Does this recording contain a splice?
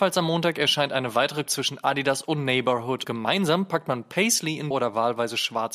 yes; 3 cuts; at 1.5 s, 3.0 s, 4.7 s

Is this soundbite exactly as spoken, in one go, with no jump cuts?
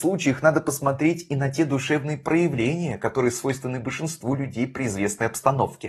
yes; 0 cuts

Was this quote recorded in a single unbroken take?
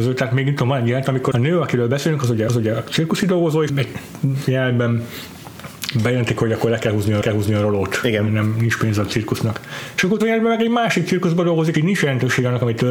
no; 6 cuts; at 1.3 s, 2.5 s, 3.7 s, 7.2 s, 10.2 s, 11.7 s

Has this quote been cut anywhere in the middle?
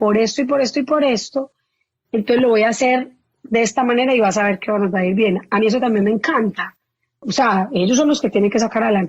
no; 0 cuts

